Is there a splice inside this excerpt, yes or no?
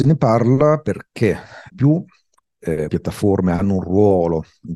yes